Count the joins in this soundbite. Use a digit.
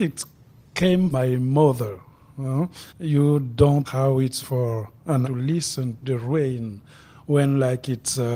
6